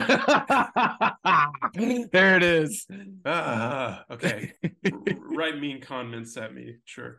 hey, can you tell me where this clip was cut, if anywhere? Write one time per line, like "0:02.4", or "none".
0:04.6